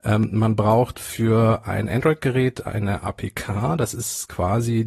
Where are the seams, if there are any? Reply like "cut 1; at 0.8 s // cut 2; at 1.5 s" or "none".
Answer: none